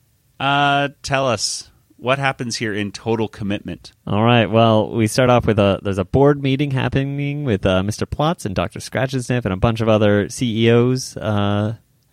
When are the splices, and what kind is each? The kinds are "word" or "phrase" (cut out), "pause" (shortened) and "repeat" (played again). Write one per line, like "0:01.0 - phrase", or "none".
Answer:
none